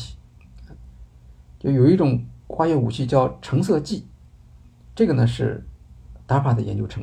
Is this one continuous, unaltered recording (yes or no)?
yes